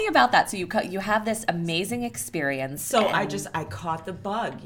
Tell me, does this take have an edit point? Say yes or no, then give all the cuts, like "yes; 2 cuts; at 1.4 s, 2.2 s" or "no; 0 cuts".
no; 0 cuts